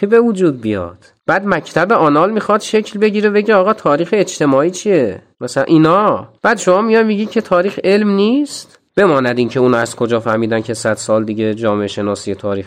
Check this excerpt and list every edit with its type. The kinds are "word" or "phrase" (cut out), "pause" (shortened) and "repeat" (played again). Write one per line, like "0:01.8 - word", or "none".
0:01.2 - pause
0:05.3 - pause
0:06.4 - pause
0:08.9 - pause